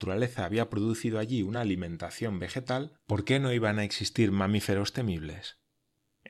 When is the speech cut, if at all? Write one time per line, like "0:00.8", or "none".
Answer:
none